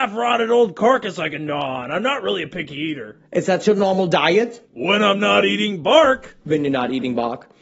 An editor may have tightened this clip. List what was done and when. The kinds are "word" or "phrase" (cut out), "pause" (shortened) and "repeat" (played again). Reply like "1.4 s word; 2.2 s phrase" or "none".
4.6 s pause; 6.4 s pause